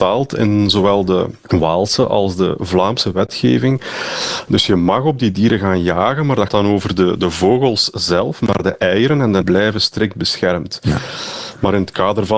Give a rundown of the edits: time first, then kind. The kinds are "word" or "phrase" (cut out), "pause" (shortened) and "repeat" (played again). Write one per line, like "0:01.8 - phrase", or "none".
0:01.4 - pause
0:06.5 - word
0:09.4 - phrase

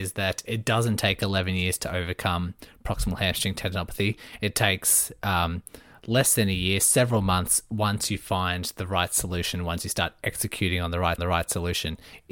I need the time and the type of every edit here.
0:11.2 - repeat

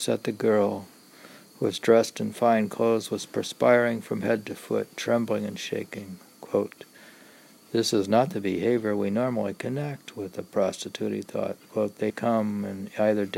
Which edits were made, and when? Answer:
0:12.1 - word

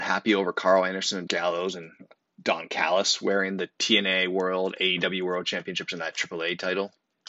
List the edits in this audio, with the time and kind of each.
0:01.3 - word
0:02.2 - word

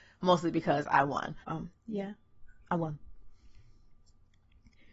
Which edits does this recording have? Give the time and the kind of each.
0:01.4 - pause

